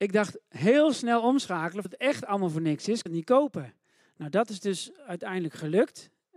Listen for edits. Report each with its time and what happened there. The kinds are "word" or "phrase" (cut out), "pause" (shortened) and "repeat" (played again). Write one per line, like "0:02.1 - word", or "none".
0:01.8 - word
0:03.1 - word
0:04.0 - pause